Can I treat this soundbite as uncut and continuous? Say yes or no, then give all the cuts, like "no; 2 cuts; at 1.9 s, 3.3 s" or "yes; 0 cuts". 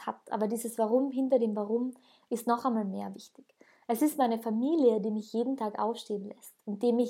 yes; 0 cuts